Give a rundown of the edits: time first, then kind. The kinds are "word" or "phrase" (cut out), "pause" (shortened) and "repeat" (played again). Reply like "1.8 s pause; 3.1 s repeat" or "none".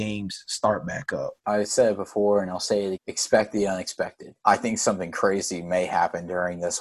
1.4 s pause; 2.9 s word; 4.4 s pause